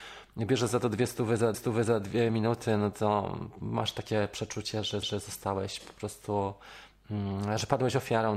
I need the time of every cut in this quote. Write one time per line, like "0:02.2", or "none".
0:01.5
0:05.0